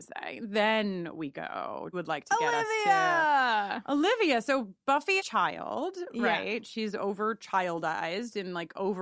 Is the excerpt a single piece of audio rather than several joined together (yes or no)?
no